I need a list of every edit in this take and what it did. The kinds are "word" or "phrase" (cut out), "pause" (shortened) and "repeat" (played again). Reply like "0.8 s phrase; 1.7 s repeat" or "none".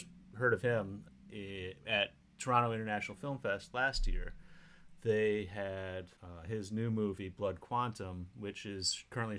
6.2 s pause